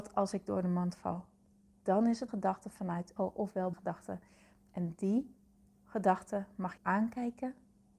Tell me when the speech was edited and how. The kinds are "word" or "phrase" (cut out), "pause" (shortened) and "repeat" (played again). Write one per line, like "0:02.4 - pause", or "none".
0:02.3 - word
0:03.2 - word
0:03.7 - word
0:06.8 - word